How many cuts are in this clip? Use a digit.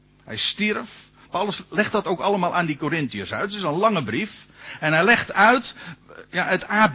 0